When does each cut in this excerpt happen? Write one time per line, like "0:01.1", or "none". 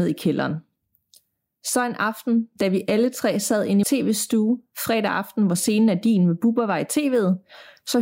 0:03.8